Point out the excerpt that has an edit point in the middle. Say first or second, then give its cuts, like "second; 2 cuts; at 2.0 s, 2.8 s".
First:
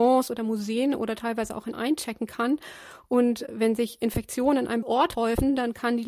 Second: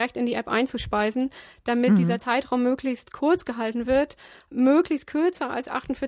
first; 2 cuts; at 1.7 s, 4.8 s